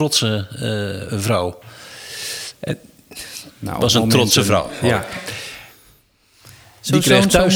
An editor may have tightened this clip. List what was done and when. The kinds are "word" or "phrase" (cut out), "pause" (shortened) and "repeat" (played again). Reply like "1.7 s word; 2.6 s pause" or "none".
none